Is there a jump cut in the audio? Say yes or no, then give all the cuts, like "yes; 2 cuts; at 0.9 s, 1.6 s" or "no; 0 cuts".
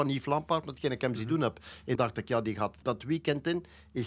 yes; 2 cuts; at 2.0 s, 2.8 s